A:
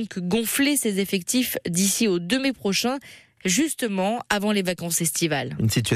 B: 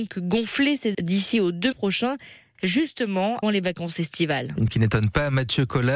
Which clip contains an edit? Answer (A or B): B